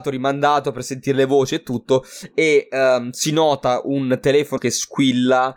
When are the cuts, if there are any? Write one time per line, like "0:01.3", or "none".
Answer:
0:04.6